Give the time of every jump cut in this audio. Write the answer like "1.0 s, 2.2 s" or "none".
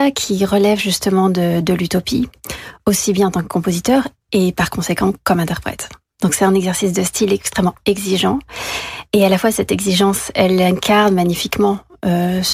none